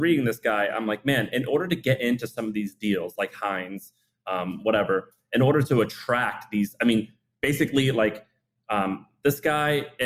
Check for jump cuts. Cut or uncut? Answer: uncut